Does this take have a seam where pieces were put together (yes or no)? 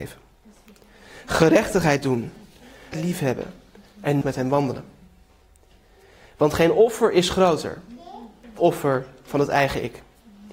yes